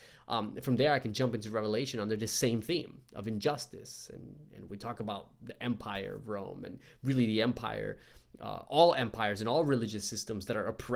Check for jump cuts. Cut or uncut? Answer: uncut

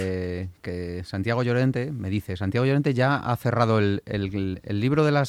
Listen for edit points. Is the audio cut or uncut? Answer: uncut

